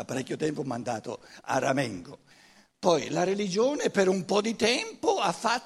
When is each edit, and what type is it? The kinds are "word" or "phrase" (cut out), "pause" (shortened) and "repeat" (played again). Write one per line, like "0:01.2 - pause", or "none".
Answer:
0:02.3 - pause

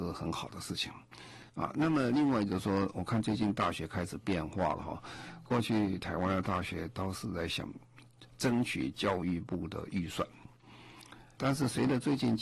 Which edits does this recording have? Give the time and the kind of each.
0:01.5 - pause
0:08.3 - pause
0:11.4 - word

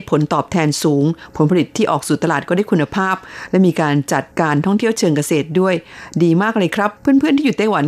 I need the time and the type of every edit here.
0:04.3 - pause
0:07.0 - pause

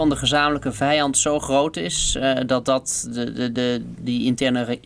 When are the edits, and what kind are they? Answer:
none

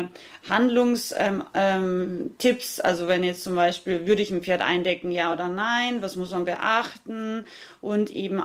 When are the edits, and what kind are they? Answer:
none

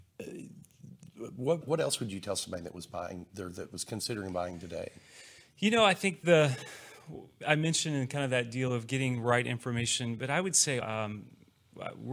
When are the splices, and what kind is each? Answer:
0:01.6 - word
0:07.4 - word
0:10.8 - word

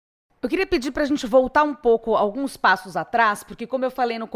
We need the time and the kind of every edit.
none

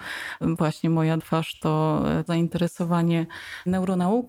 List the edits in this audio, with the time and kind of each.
0:01.2 - word
0:02.3 - word

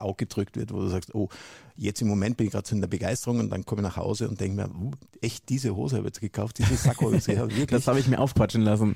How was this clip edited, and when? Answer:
none

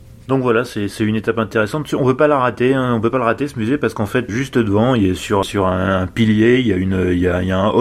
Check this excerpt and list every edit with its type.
0:04.3 - word
0:05.4 - word

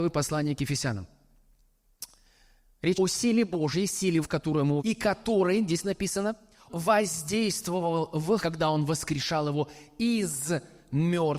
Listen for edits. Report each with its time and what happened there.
0:02.9 - word
0:04.2 - word
0:04.8 - word
0:06.7 - word
0:08.4 - word

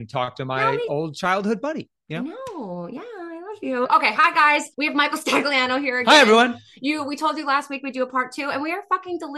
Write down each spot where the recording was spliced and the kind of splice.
0:04.7 - pause

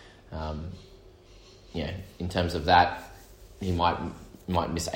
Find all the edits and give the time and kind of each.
none

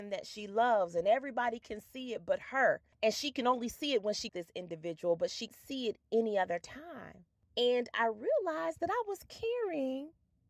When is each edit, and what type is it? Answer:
0:04.3 - phrase
0:05.5 - word

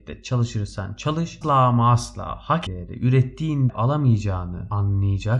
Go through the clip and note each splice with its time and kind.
0:01.4 - word
0:02.7 - word
0:03.7 - word

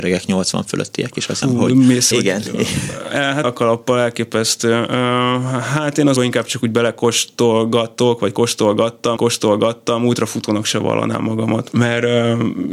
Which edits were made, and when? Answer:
0:01.4 - word
0:02.1 - word
0:03.4 - word
0:06.2 - word
0:09.2 - repeat
0:11.7 - word

